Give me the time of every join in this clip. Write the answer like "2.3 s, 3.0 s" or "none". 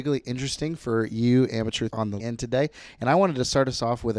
1.9 s, 2.2 s